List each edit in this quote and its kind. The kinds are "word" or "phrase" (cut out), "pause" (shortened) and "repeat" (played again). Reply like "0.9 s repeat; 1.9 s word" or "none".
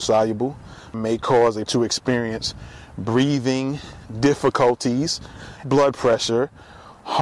0.9 s word; 1.7 s word; 5.6 s word